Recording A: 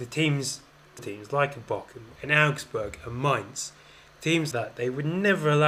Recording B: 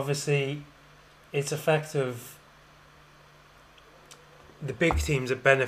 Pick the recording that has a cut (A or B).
A